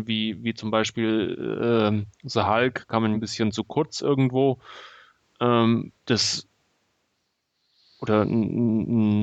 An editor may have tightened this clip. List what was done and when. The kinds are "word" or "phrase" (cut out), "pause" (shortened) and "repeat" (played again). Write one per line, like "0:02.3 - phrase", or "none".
0:03.1 - word
0:06.0 - pause